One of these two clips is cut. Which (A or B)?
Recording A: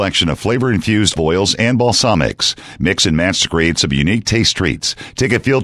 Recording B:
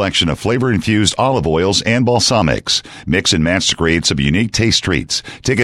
A